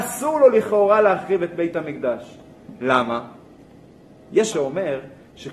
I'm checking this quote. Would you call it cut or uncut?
cut